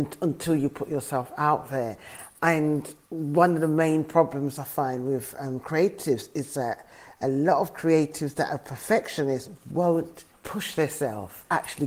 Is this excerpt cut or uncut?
cut